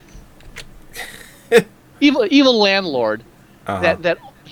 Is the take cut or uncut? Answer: uncut